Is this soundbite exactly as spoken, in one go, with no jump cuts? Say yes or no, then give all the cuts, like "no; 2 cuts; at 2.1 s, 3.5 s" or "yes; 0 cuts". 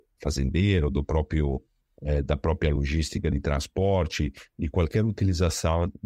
yes; 0 cuts